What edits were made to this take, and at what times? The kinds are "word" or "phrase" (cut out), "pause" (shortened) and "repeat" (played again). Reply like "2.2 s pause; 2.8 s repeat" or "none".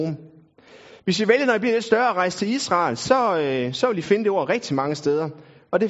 1.0 s pause